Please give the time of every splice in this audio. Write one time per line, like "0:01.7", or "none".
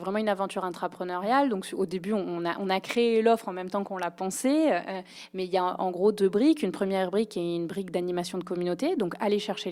none